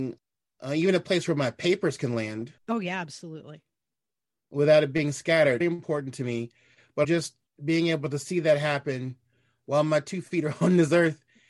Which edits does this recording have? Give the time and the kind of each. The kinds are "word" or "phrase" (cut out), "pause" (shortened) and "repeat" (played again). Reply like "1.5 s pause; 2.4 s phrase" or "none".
2.6 s pause; 5.6 s word; 7.0 s word

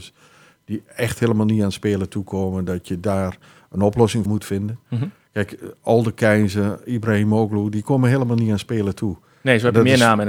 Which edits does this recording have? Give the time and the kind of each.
4.3 s word

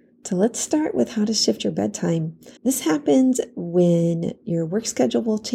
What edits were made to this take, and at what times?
2.6 s pause

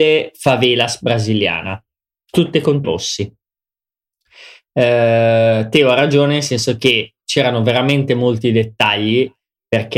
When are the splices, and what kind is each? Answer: 2.8 s word

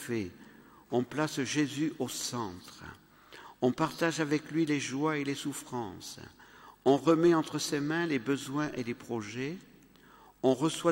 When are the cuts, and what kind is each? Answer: none

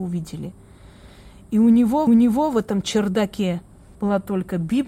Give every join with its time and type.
2.1 s repeat; 3.9 s pause

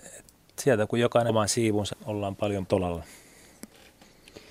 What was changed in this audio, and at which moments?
1.3 s word; 1.9 s word; 2.7 s word

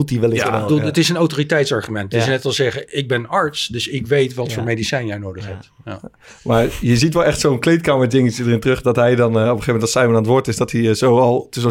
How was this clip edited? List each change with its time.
none

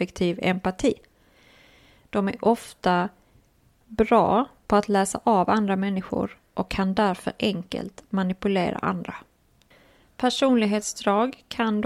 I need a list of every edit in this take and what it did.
none

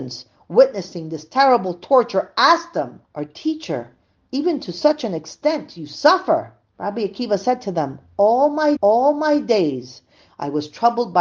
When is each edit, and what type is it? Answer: 3.0 s pause; 6.7 s pause; 8.8 s repeat

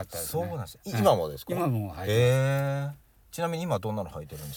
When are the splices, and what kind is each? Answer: none

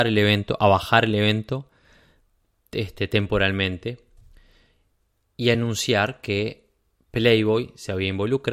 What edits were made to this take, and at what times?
none

